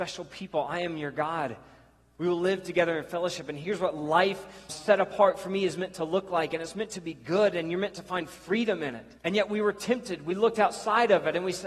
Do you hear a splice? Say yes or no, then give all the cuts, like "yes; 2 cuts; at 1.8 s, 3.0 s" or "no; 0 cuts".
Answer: yes; 2 cuts; at 4.7 s, 9.2 s